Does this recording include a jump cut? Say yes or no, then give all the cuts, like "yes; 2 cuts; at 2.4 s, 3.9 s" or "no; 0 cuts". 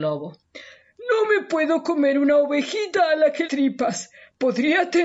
yes; 1 cut; at 3.5 s